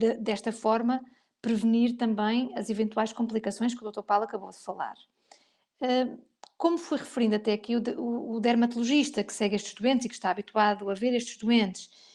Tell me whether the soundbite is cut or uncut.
uncut